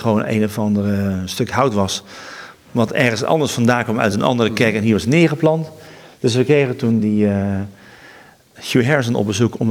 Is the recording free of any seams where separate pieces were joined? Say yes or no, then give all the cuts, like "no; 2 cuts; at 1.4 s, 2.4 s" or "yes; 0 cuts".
yes; 0 cuts